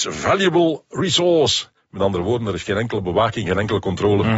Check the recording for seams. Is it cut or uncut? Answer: uncut